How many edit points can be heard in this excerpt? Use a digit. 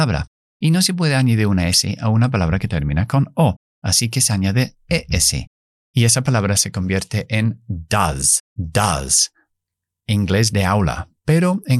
1